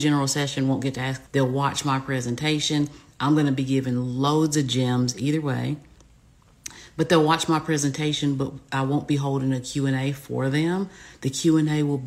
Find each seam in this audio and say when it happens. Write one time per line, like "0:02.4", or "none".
0:01.3